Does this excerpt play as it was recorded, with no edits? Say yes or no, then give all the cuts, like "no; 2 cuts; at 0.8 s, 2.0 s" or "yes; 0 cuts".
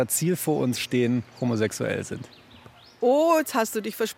yes; 0 cuts